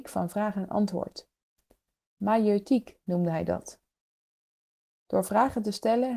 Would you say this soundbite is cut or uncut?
uncut